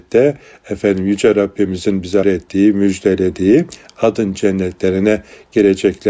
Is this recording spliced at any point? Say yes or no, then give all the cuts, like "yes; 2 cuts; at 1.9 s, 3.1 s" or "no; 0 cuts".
yes; 1 cut; at 2.2 s